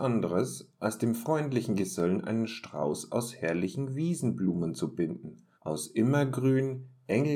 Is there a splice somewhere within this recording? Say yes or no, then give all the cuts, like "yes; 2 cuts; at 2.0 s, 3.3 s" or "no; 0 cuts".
yes; 1 cut; at 5.5 s